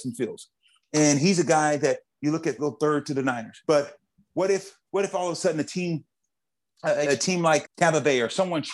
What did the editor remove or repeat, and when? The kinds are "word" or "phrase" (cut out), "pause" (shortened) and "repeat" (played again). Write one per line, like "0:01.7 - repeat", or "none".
0:02.6 - word
0:03.6 - pause
0:04.8 - pause
0:07.0 - word
0:07.6 - word